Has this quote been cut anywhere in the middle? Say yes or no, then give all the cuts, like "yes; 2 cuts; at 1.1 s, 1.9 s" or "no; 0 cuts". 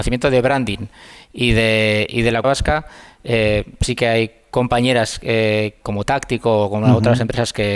yes; 1 cut; at 2.4 s